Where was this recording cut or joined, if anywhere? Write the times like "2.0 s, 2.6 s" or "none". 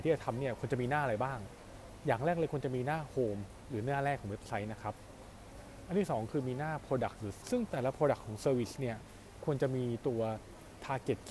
7.4 s